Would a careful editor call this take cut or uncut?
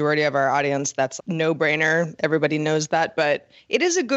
cut